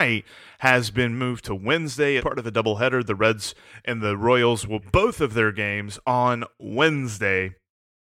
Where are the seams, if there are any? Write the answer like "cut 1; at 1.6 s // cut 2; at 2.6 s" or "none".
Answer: cut 1; at 2.2 s // cut 2; at 4.8 s